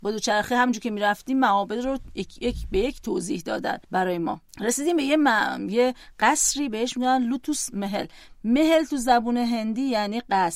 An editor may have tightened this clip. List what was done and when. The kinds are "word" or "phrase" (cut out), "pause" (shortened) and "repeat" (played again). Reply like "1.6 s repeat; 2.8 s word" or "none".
3.8 s pause; 4.5 s pause